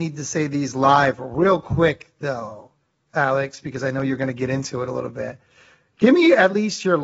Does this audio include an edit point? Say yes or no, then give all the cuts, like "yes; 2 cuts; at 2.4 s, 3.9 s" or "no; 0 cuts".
no; 0 cuts